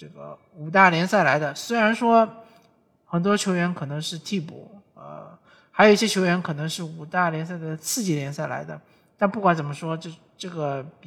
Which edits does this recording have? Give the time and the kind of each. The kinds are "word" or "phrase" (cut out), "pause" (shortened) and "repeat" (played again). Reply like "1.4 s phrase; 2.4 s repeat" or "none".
none